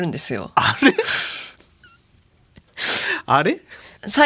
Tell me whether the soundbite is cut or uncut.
uncut